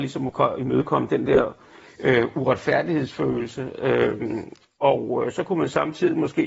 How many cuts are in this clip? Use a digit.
0